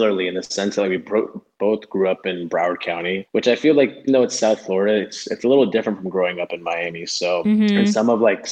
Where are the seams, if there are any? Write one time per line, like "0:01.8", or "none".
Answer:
0:04.1